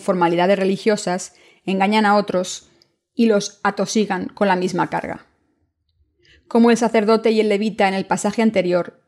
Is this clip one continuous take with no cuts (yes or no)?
yes